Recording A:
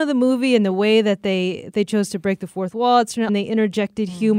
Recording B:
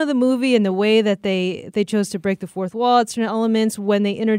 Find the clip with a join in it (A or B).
A